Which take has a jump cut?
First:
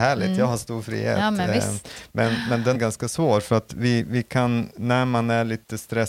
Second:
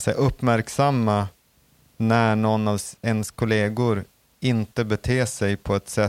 first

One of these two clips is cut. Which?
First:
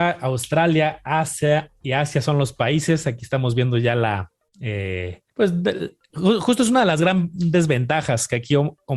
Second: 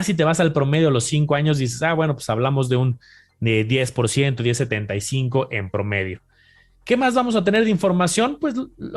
first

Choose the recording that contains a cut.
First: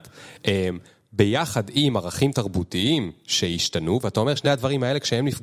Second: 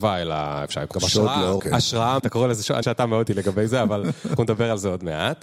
second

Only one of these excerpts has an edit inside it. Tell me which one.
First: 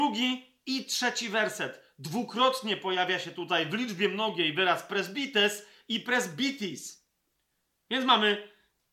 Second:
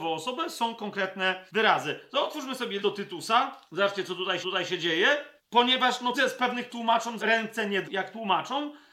second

